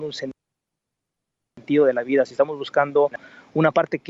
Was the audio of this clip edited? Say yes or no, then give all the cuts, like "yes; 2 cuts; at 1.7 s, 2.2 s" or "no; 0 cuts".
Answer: no; 0 cuts